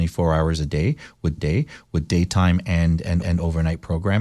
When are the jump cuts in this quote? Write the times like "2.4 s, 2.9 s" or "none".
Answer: 1.4 s, 3.2 s